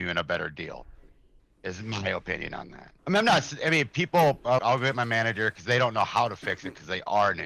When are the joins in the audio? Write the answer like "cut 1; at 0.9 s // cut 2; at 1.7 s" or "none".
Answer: cut 1; at 1.4 s // cut 2; at 3.0 s // cut 3; at 4.6 s